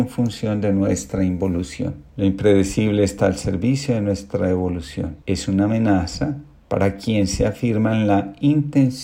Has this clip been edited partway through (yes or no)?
yes